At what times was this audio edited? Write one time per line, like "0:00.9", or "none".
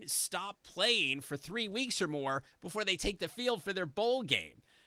none